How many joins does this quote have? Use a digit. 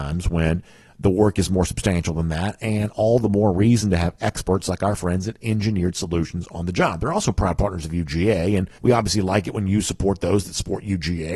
1